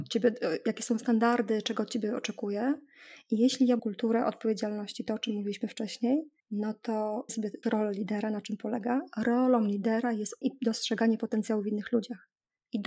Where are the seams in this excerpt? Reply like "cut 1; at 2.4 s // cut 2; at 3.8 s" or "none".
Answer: cut 1; at 3.8 s // cut 2; at 6.4 s // cut 3; at 7.3 s // cut 4; at 7.6 s // cut 5; at 10.4 s